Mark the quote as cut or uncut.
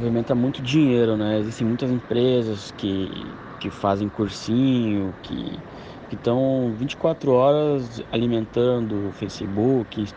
cut